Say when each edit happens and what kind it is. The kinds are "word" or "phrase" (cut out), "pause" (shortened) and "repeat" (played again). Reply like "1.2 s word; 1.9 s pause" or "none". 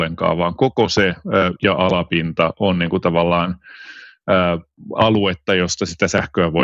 1.5 s word